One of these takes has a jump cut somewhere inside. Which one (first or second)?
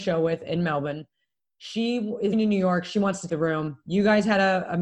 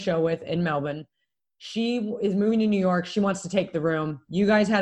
first